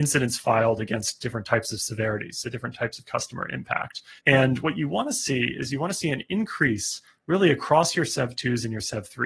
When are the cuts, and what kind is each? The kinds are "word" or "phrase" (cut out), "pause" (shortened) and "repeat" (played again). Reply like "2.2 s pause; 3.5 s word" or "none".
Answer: 4.2 s pause